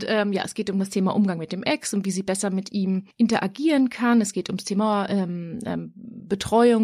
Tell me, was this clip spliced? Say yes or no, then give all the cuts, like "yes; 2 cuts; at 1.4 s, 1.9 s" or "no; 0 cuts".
no; 0 cuts